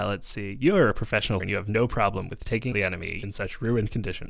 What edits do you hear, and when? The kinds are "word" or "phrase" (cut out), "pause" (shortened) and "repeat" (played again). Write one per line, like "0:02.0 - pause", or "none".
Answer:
0:01.4 - word
0:02.7 - word
0:03.2 - word